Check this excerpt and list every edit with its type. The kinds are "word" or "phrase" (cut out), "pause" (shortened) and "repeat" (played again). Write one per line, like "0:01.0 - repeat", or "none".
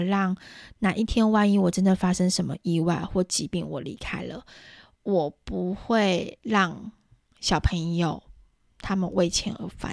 none